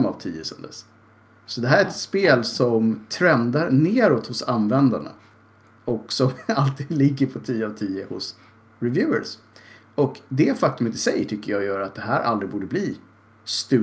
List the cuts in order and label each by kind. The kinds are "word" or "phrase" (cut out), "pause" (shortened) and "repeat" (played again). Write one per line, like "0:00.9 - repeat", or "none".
none